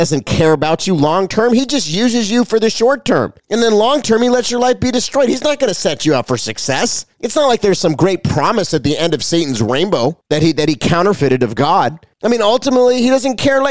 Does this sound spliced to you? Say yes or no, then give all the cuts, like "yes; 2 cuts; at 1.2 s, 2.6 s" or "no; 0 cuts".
yes; 4 cuts; at 3.4 s, 7.1 s, 10.2 s, 12.1 s